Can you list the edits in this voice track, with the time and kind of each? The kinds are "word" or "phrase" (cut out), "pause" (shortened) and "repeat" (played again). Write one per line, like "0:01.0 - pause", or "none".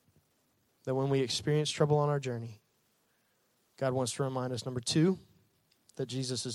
none